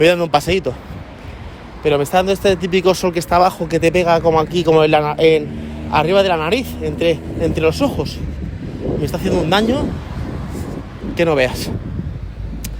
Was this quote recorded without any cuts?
yes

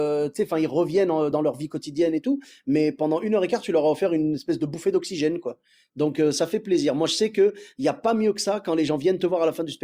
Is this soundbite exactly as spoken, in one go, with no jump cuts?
yes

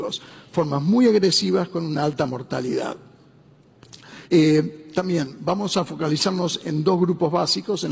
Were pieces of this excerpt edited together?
yes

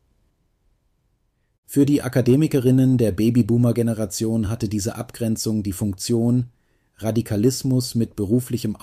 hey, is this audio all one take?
yes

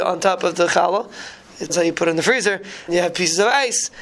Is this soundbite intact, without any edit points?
no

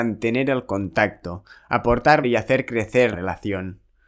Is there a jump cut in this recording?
yes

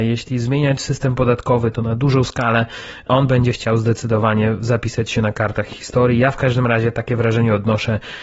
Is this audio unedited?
yes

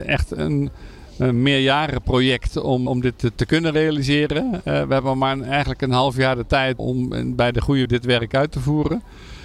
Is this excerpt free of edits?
no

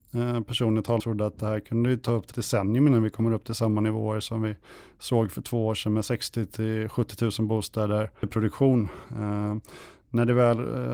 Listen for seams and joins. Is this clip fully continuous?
no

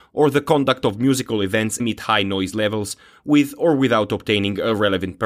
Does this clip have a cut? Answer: yes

